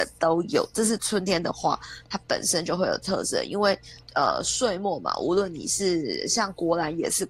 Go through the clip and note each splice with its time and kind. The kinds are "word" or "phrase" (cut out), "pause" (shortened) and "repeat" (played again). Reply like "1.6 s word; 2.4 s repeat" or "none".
4.0 s pause